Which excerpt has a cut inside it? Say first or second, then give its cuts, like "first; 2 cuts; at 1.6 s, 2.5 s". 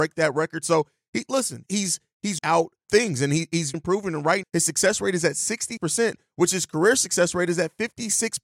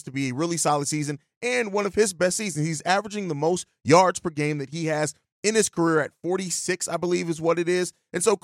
first; 6 cuts; at 1.7 s, 2.4 s, 2.8 s, 3.7 s, 4.4 s, 5.8 s